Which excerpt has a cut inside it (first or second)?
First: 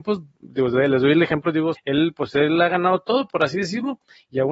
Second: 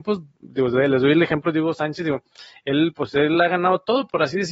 first